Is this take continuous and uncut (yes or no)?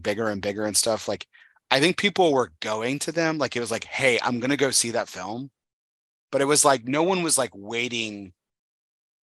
yes